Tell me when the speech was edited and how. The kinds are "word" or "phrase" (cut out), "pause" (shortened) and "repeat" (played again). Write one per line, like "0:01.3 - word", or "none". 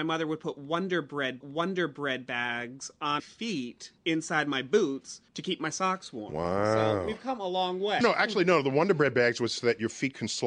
0:01.4 - repeat
0:03.2 - word
0:04.0 - pause
0:05.3 - pause
0:08.0 - phrase